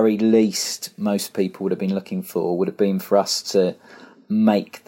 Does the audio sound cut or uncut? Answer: uncut